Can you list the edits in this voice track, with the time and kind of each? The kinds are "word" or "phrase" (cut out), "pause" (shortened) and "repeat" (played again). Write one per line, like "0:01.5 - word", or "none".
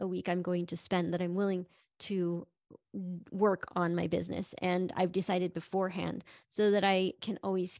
none